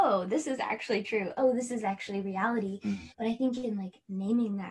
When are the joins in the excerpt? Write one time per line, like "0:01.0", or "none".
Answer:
0:03.1